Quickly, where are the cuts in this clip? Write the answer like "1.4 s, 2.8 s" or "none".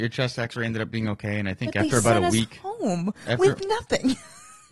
none

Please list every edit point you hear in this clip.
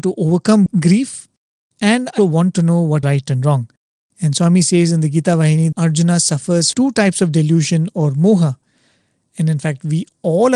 2.2 s, 3.0 s, 5.7 s, 6.7 s

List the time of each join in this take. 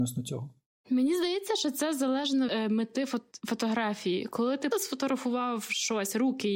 2.5 s, 4.7 s

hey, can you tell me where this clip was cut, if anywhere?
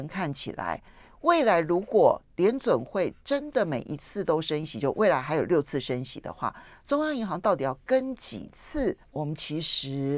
9.0 s

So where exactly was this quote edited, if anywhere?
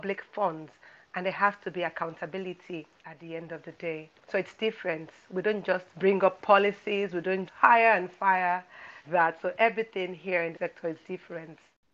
3.0 s, 4.2 s, 5.9 s, 7.5 s, 9.0 s, 10.5 s

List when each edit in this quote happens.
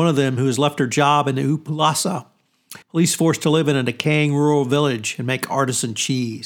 2.8 s

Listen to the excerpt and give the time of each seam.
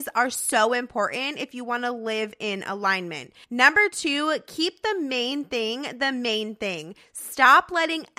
3.4 s

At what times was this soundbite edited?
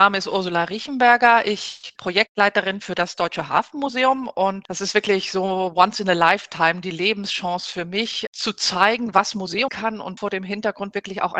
2.0 s, 4.6 s, 8.3 s, 9.7 s, 10.2 s

